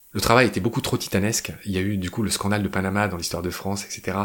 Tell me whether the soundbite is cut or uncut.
uncut